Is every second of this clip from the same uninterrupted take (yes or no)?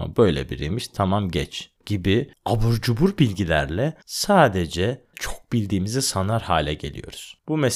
no